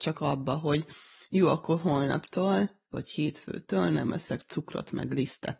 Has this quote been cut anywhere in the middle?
no; 0 cuts

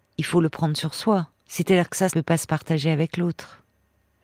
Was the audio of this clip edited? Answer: yes; 2 cuts; at 1.4 s, 2.1 s

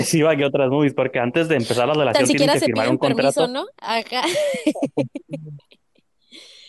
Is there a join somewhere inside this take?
no; 0 cuts

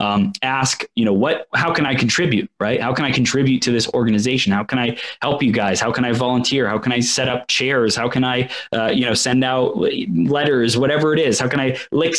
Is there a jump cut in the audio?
no; 0 cuts

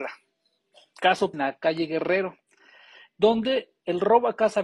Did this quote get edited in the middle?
yes; 1 cut; at 1.3 s

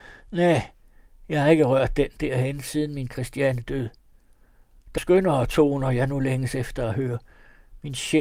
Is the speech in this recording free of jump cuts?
no; 1 cut; at 5.0 s

